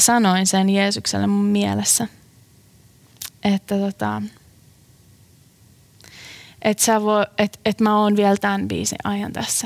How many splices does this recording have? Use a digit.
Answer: 0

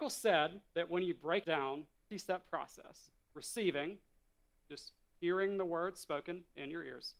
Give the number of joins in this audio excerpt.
3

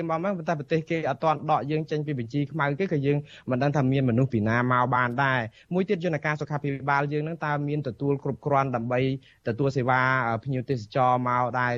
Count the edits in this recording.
0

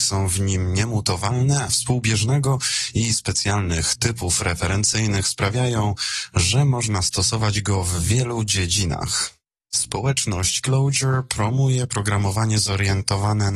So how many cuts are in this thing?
1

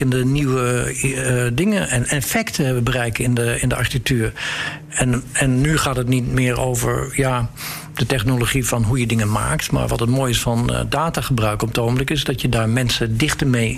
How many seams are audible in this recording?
0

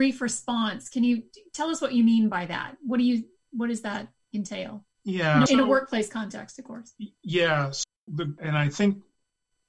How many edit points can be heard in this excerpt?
3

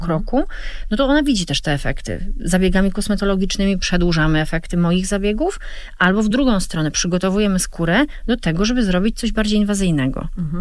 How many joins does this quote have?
0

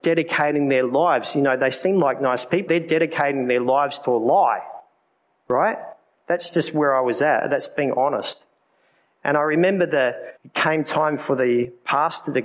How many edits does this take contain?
2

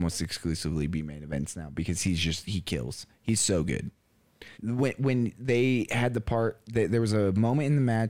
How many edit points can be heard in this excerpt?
1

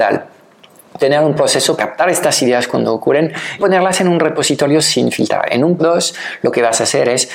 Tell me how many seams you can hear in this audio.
3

